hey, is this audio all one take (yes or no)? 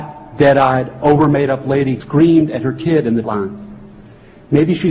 no